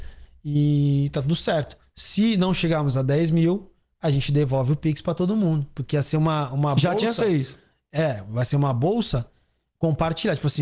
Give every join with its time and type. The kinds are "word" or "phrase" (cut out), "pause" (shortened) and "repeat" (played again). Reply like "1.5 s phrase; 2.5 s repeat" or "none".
none